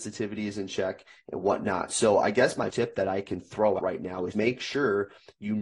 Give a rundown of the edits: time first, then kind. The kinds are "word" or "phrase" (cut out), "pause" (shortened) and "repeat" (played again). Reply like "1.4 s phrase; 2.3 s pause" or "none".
2.7 s word; 3.8 s word; 4.3 s word